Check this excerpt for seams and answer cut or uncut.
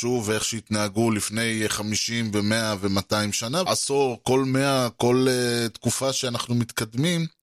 cut